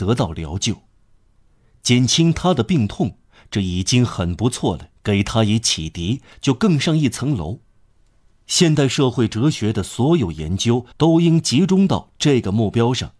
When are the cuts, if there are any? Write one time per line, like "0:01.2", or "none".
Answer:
0:05.0
0:10.9